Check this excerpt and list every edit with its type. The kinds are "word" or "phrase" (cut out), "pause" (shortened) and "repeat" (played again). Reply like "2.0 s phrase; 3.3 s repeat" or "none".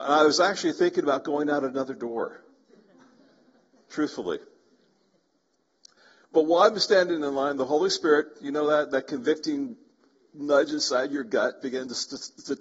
none